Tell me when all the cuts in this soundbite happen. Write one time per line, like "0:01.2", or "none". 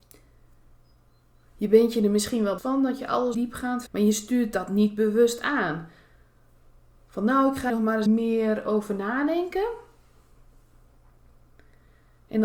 0:02.6
0:03.3
0:03.9
0:07.7
0:08.1